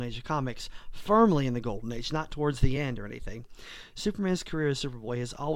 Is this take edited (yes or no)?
no